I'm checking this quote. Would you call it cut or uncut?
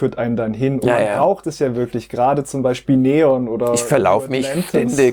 uncut